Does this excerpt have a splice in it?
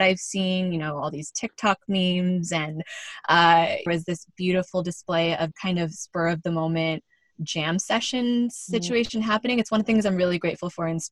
yes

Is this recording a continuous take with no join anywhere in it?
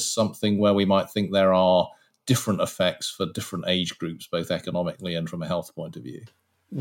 yes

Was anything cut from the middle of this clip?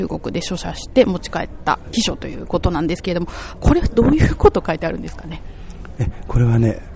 no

